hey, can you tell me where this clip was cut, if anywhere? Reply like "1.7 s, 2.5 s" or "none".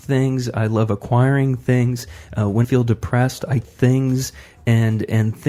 2.6 s, 3.6 s